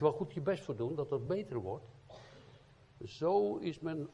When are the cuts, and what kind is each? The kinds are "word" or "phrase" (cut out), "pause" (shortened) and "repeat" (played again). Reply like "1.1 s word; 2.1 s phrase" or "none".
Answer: none